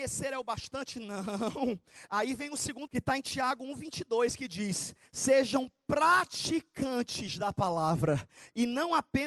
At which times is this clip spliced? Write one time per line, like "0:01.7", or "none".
0:02.9